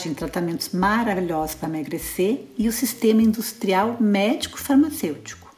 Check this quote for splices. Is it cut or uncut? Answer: uncut